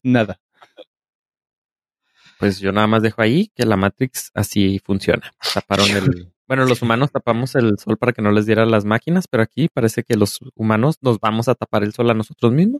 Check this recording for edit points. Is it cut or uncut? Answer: uncut